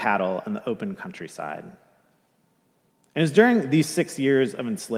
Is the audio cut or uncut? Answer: uncut